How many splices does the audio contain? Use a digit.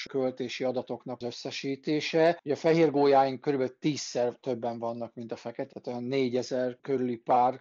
2